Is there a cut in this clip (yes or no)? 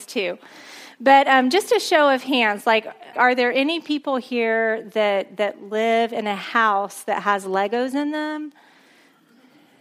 yes